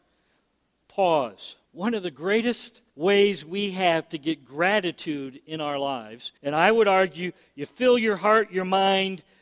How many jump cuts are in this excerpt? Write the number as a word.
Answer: three